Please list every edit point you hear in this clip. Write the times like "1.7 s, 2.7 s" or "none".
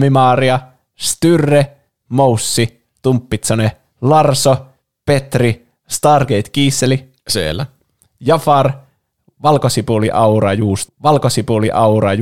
10.9 s